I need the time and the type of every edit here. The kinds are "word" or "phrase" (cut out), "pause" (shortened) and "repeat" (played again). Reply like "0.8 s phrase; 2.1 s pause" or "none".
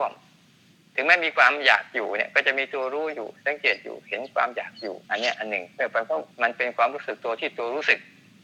5.0 s pause; 6.3 s pause